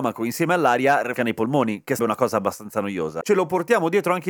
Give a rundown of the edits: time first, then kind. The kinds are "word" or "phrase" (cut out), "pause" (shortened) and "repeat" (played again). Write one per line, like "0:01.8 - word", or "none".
0:01.2 - word
0:02.0 - word
0:03.2 - word